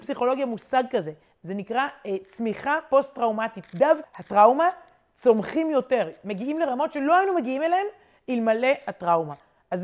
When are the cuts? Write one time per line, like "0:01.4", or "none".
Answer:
0:04.0